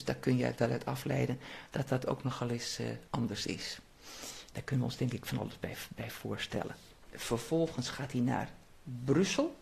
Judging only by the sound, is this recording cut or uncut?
cut